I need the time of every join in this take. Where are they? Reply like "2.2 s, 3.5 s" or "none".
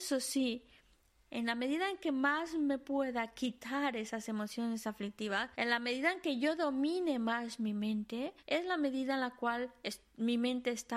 5.5 s, 8.4 s

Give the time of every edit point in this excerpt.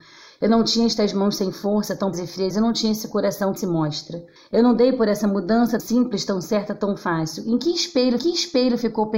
2.1 s, 2.5 s, 3.6 s, 4.4 s, 5.8 s, 8.2 s

